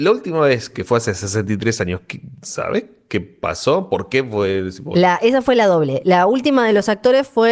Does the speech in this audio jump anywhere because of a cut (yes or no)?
no